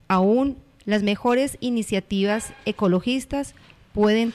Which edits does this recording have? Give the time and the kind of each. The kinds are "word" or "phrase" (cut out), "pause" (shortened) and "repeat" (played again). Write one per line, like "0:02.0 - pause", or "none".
none